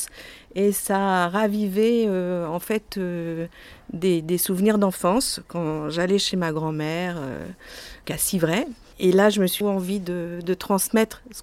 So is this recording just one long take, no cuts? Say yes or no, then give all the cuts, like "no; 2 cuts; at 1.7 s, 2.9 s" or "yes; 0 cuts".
no; 2 cuts; at 8.0 s, 9.6 s